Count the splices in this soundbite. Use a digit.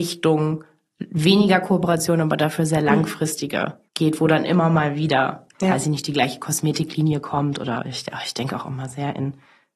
1